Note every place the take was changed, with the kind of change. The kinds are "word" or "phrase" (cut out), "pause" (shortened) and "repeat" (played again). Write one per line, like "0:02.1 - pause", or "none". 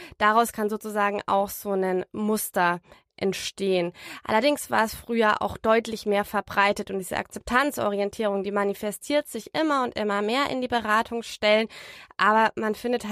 none

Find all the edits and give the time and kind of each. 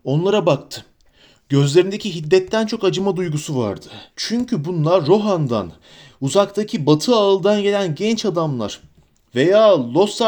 0:04.1 - pause

